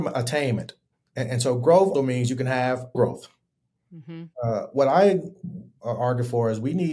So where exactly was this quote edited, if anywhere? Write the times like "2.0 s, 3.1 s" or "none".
0.9 s, 1.9 s, 2.9 s, 4.3 s